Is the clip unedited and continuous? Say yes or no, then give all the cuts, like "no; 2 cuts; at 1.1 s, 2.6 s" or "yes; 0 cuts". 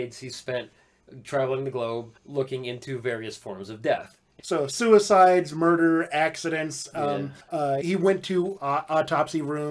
no; 4 cuts; at 2.2 s, 7.4 s, 7.8 s, 8.6 s